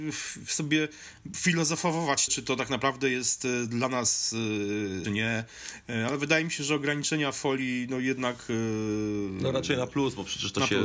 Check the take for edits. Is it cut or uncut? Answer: cut